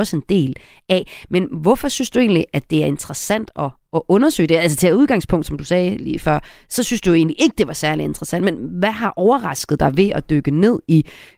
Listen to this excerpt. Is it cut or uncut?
uncut